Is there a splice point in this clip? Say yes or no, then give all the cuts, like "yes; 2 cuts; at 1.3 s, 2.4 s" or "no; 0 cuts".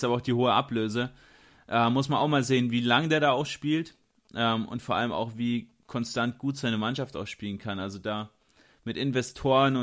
no; 0 cuts